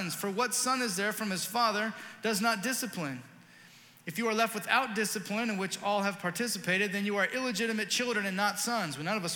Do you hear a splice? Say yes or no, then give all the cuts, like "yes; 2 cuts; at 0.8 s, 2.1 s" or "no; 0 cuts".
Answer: no; 0 cuts